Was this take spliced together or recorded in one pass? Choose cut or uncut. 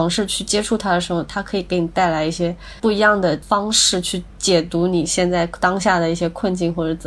cut